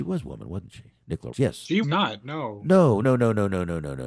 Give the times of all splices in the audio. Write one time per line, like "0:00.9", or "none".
0:01.3
0:01.8
0:03.0